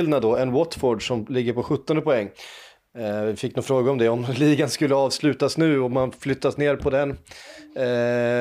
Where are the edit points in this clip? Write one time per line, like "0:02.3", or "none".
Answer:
none